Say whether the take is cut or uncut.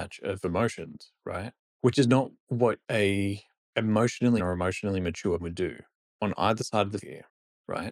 cut